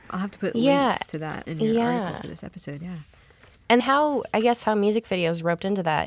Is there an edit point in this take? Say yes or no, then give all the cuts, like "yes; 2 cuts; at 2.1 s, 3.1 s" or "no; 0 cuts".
yes; 2 cuts; at 1.4 s, 3.8 s